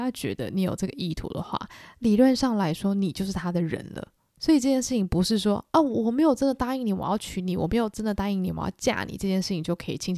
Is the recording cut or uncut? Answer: uncut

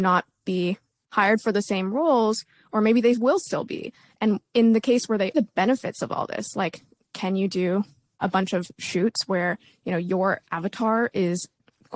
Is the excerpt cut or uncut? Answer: cut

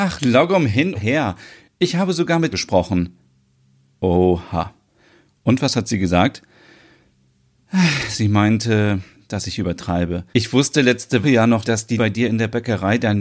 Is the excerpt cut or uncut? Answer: cut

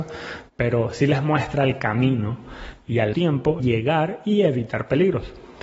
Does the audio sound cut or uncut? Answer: cut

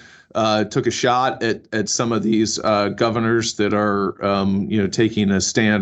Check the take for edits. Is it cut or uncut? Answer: uncut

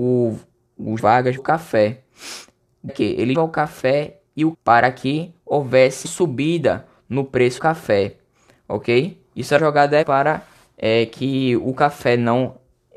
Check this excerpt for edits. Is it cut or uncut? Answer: cut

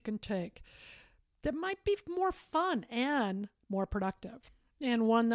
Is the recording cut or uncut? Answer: uncut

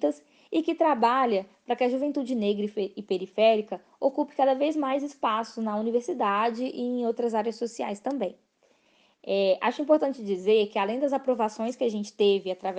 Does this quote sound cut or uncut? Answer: uncut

